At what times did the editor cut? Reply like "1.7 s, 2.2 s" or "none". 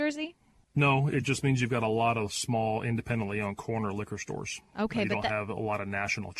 none